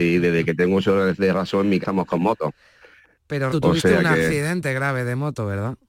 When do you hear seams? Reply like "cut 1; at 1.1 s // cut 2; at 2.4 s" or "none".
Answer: cut 1; at 1.8 s // cut 2; at 3.5 s